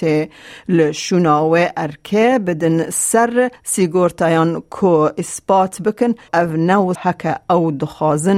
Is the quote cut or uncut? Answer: cut